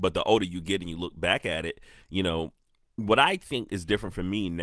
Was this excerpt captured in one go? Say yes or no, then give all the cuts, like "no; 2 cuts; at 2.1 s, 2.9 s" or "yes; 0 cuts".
yes; 0 cuts